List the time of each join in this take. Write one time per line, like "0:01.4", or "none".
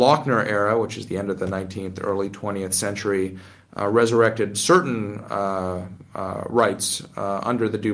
none